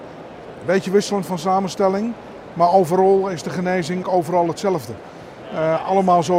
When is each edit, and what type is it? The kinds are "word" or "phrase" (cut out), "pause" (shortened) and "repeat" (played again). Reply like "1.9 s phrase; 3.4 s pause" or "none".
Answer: 4.0 s word